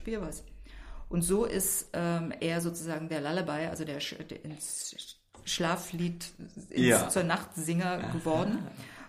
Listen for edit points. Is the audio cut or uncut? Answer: uncut